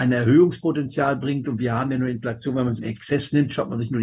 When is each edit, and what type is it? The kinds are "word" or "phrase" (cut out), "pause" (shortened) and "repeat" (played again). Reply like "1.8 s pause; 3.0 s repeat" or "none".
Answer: 2.8 s word